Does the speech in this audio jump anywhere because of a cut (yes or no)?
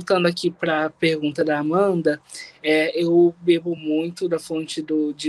no